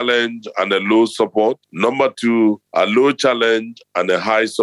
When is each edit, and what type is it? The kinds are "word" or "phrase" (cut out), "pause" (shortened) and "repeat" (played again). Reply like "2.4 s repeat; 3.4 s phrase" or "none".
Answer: 1.6 s pause; 2.6 s pause

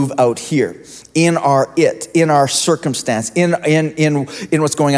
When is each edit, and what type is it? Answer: none

